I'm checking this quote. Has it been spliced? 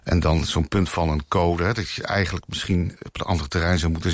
no; 0 cuts

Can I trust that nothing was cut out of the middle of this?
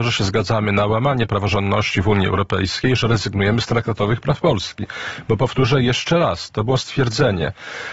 yes; 0 cuts

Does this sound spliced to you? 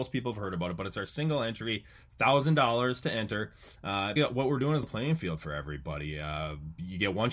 yes; 2 cuts; at 4.2 s, 4.8 s

